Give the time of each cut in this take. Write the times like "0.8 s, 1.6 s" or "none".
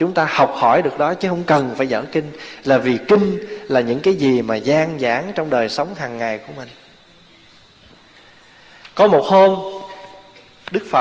none